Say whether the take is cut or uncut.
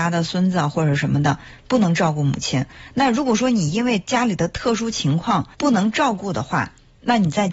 cut